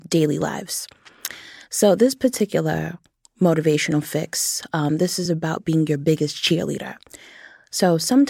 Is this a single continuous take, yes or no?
yes